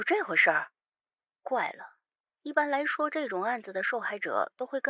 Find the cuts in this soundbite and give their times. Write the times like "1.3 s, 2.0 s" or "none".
1.0 s